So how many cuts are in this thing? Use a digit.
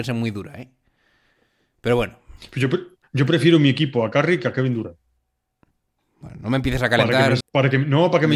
1